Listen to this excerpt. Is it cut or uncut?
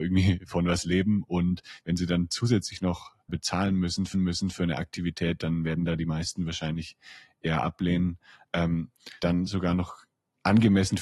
cut